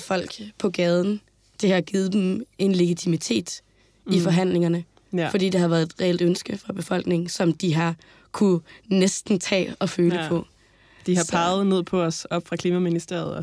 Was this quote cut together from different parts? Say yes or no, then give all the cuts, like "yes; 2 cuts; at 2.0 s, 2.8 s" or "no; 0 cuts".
no; 0 cuts